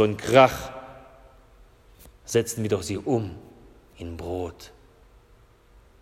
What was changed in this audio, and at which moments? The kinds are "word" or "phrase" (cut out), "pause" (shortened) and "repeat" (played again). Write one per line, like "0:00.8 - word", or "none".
none